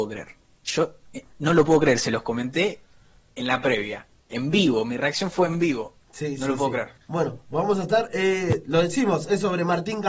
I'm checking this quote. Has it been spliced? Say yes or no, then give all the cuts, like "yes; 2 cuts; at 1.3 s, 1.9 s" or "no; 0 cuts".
yes; 2 cuts; at 4.2 s, 7.0 s